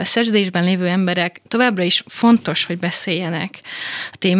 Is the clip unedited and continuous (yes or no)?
no